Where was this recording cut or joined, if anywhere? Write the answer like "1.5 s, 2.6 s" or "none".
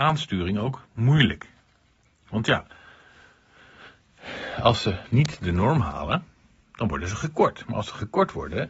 none

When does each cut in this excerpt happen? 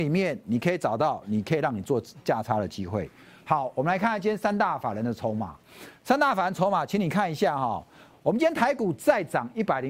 none

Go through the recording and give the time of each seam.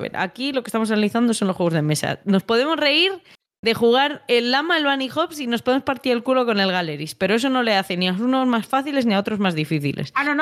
none

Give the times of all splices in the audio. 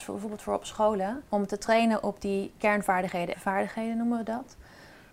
1.3 s, 3.3 s

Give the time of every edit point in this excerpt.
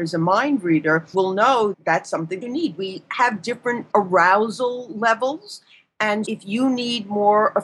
1.1 s, 1.7 s, 2.4 s, 3.9 s, 6.3 s

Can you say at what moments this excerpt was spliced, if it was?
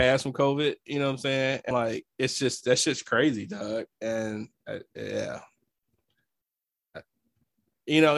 1.7 s

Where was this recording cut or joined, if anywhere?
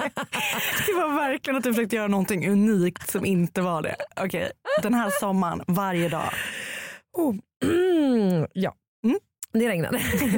none

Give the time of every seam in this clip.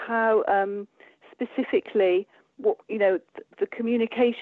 2.6 s, 3.5 s

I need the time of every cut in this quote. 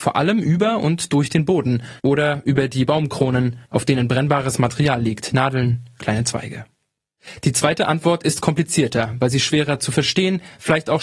2.0 s, 3.7 s

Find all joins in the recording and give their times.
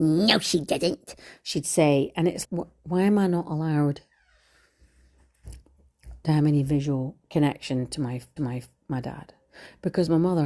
2.4 s, 7.2 s, 8.4 s

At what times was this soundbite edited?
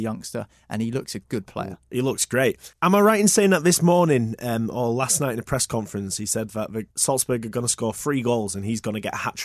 2.7 s, 6.9 s

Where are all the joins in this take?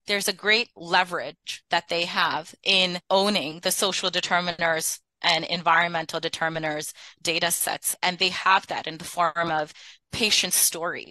none

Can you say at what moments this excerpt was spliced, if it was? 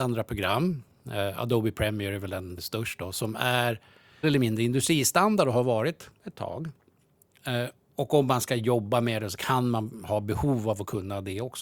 2.6 s, 4.2 s

